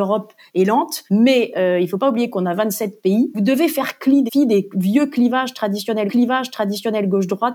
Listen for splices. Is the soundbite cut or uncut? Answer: cut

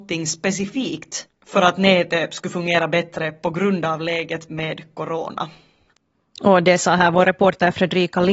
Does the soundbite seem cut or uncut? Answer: uncut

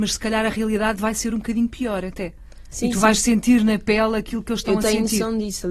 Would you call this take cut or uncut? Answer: uncut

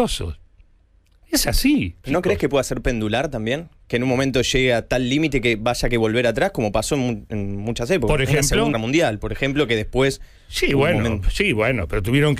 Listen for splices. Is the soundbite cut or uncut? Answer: cut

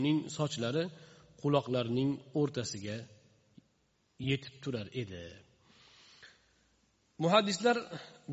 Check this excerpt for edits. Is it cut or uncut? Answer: uncut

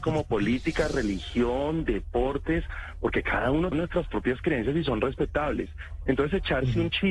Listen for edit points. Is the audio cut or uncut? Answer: cut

